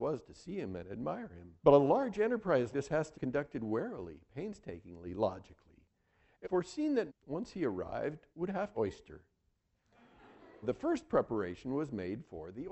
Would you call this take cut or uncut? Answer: cut